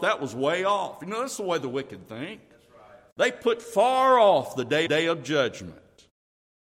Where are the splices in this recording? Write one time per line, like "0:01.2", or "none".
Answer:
0:04.9